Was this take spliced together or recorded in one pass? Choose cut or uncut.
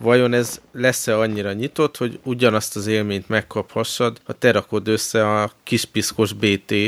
cut